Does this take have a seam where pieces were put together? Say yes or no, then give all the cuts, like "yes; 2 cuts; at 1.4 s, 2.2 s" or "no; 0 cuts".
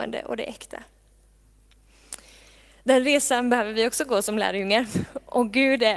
no; 0 cuts